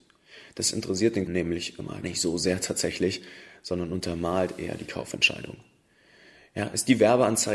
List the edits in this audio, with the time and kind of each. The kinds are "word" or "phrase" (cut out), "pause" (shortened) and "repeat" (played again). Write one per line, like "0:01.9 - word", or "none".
0:01.3 - word
0:02.0 - word